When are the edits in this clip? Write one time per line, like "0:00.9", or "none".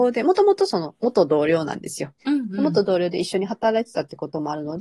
0:02.2